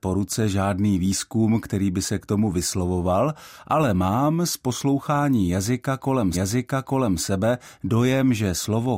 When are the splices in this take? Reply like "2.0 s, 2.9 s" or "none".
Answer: 6.3 s